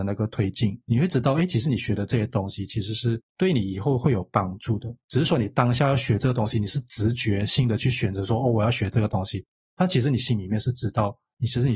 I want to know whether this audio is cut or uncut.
uncut